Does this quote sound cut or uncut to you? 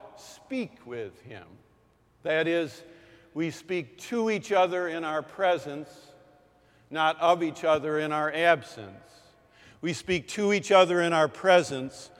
uncut